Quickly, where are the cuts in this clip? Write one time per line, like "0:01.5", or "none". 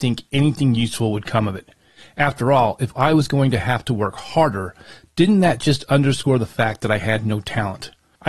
none